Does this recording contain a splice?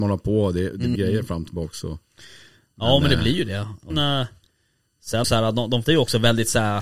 yes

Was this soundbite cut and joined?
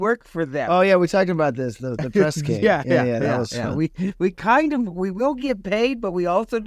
no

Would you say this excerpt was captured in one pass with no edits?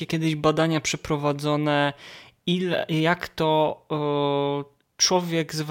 yes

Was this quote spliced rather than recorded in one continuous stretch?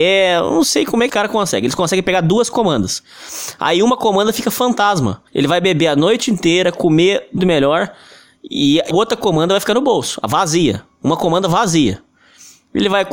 yes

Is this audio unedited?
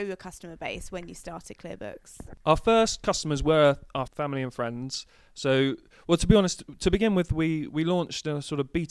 no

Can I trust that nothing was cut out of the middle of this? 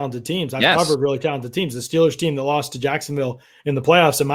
yes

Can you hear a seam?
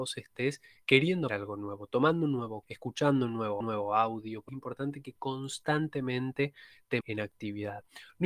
yes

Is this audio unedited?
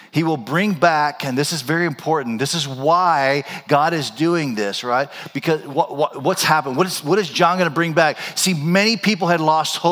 yes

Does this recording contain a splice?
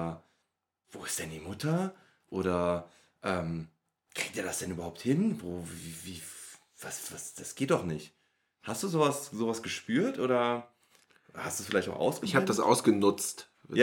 no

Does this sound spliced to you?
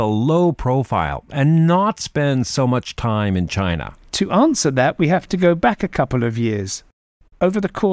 no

